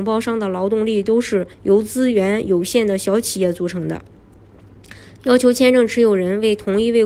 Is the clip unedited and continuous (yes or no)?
no